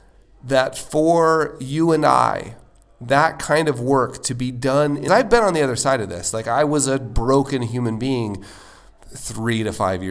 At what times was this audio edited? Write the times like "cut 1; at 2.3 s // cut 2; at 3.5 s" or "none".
cut 1; at 5.1 s